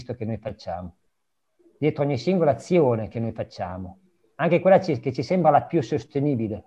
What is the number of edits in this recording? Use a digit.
0